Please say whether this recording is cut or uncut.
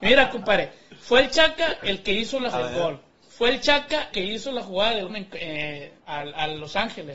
cut